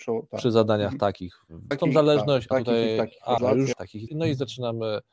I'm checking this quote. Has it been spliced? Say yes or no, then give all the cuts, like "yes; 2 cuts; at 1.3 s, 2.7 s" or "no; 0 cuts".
yes; 5 cuts; at 1.7 s, 2.5 s, 3.4 s, 3.7 s, 4.1 s